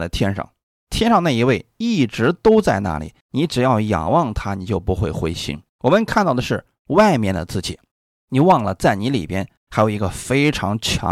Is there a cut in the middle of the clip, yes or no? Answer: yes